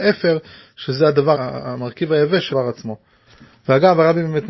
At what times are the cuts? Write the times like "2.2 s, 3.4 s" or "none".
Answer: 1.3 s, 2.5 s